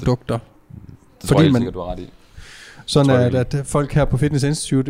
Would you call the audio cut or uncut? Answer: uncut